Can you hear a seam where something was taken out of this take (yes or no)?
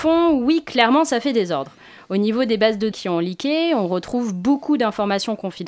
yes